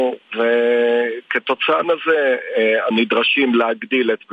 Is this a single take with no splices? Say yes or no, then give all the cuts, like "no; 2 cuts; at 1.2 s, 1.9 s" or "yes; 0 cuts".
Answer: no; 2 cuts; at 1.8 s, 2.9 s